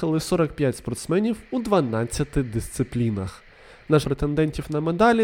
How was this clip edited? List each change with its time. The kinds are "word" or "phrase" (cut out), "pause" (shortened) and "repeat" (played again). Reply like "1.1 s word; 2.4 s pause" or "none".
4.0 s phrase